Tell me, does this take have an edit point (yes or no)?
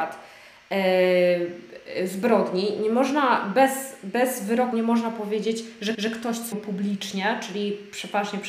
yes